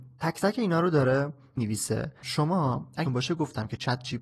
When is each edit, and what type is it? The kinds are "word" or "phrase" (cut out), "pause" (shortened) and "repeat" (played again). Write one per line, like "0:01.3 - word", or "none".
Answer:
0:01.6 - word
0:02.2 - word
0:03.1 - word